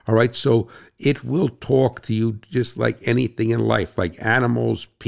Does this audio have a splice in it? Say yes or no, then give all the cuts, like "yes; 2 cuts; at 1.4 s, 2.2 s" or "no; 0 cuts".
no; 0 cuts